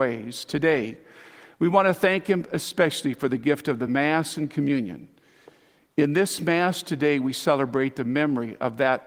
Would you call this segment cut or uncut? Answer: uncut